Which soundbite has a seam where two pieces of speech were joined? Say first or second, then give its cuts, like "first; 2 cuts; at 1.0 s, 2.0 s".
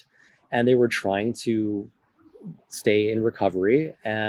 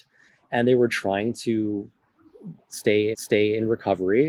second; 1 cut; at 3.1 s